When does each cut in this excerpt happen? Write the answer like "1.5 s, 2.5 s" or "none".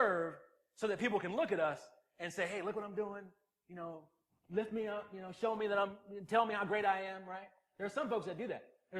none